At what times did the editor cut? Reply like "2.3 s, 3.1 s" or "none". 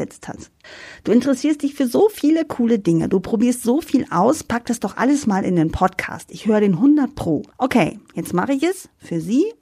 7.5 s